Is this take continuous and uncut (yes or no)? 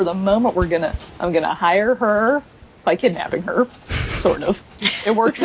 yes